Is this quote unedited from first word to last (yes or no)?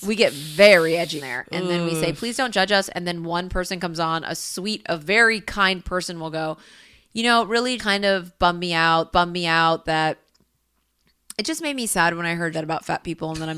no